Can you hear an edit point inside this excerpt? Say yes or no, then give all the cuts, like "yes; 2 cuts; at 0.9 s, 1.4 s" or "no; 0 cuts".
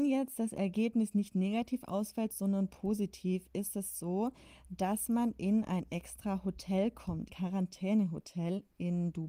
yes; 1 cut; at 7.3 s